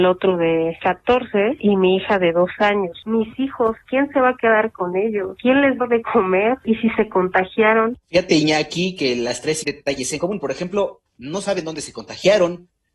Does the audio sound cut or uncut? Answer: cut